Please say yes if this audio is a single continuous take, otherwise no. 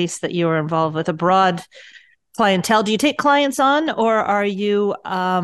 yes